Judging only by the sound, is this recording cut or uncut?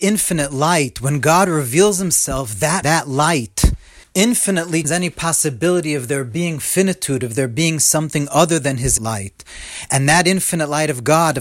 cut